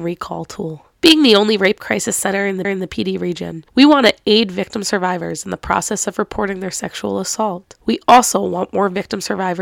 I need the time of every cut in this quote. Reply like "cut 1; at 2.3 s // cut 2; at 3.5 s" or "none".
cut 1; at 2.6 s // cut 2; at 3.7 s